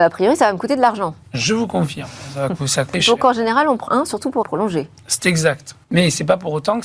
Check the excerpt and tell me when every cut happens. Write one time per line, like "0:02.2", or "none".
0:02.9
0:03.9
0:04.4
0:05.8